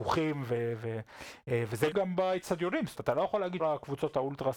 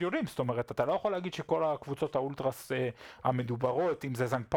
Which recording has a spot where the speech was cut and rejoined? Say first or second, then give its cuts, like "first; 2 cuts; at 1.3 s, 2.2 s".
first; 3 cuts; at 1.9 s, 2.9 s, 3.6 s